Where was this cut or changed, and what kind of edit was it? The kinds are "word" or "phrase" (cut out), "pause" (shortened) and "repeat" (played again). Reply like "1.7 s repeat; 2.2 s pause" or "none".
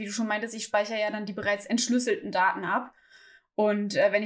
none

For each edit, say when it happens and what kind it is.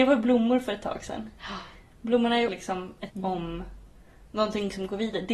2.5 s word; 3.1 s word

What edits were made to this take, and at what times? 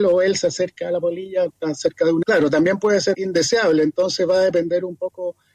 1.5 s word; 2.2 s word; 3.1 s word

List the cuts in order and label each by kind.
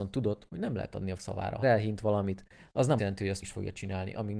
1.2 s word; 1.6 s word; 3.0 s word; 3.4 s word

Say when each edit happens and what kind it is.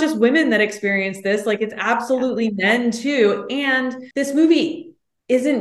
4.1 s pause

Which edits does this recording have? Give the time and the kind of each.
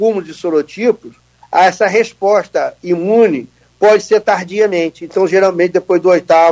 none

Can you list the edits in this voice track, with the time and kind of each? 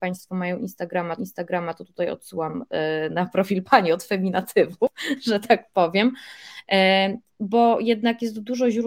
1.2 s repeat

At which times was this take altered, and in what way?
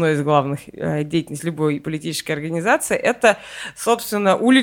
none

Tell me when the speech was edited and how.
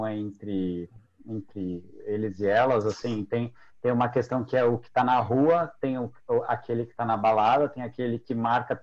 none

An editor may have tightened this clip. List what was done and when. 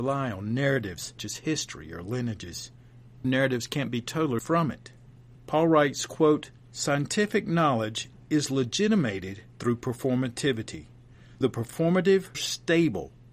1.2 s word; 3.2 s word; 4.4 s word; 5.0 s pause; 6.6 s pause; 9.5 s pause; 11.4 s word; 12.3 s word

